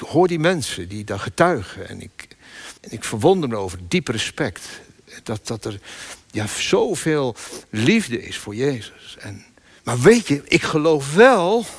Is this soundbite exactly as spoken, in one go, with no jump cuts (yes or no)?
no